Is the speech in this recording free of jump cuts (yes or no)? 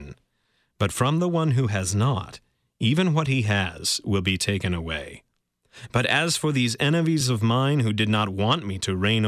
yes